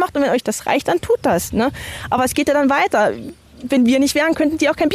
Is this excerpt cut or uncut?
uncut